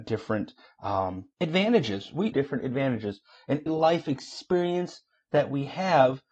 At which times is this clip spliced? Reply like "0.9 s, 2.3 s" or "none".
1.3 s, 2.3 s, 3.7 s